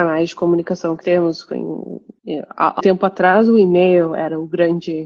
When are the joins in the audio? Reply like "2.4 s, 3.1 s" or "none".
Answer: 1.0 s, 2.8 s